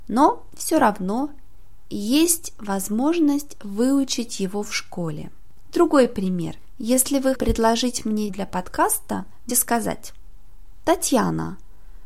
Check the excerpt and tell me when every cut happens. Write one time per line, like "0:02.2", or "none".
0:07.3
0:08.3
0:09.5